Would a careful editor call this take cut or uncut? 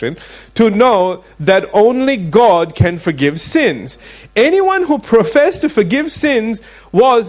uncut